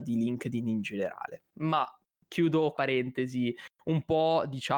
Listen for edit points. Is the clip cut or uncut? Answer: cut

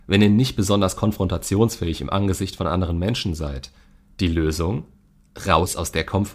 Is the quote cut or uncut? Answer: uncut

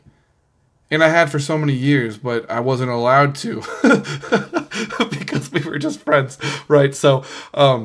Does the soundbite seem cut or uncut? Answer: uncut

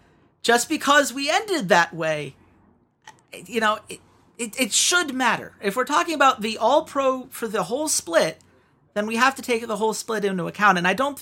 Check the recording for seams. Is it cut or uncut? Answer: uncut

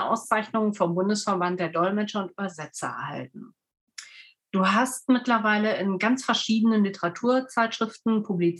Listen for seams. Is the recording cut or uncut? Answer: uncut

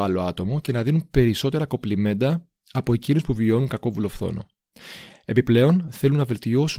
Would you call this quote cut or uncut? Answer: uncut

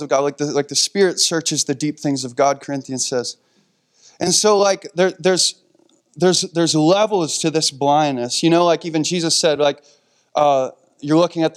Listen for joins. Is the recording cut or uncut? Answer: uncut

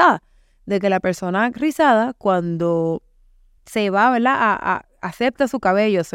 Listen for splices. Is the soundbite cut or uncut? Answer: cut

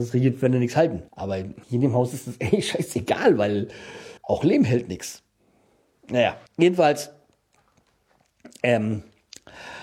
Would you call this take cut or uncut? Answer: cut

